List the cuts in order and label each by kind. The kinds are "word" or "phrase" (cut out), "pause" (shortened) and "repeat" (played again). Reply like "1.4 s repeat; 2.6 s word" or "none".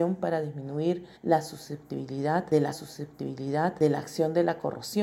1.2 s pause; 2.7 s repeat